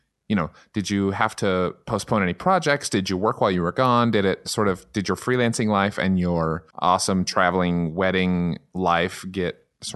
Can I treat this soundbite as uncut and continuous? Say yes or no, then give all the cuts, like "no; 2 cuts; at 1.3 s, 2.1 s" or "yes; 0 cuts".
no; 1 cut; at 6.7 s